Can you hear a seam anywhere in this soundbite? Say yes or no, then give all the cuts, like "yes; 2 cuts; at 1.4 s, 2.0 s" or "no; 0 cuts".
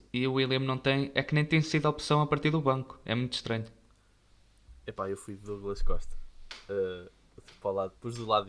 no; 0 cuts